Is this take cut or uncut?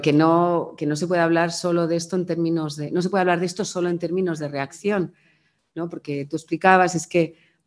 cut